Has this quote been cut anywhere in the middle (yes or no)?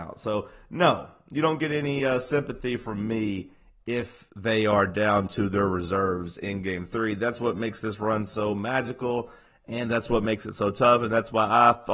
no